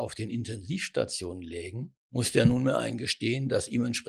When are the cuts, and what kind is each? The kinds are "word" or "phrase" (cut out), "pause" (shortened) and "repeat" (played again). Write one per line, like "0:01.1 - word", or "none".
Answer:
0:02.0 - pause